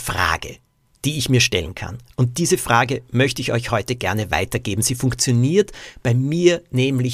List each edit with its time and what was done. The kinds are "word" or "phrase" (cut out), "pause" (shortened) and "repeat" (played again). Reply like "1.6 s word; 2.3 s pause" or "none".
none